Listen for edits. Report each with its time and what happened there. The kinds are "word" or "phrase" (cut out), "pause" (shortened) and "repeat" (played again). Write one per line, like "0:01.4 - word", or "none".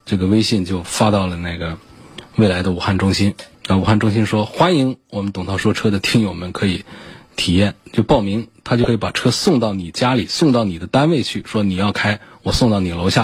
0:03.5 - pause